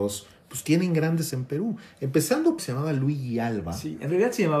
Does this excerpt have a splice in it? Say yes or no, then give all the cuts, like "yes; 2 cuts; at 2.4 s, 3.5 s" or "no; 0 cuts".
yes; 2 cuts; at 1.3 s, 2.6 s